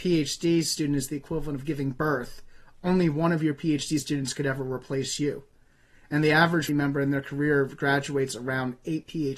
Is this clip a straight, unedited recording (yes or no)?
no